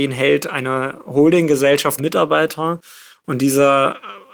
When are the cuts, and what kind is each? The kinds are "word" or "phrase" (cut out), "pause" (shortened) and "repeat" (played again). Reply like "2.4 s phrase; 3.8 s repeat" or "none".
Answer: 2.0 s word